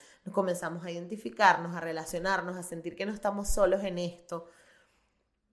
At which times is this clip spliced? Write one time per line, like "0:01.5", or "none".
none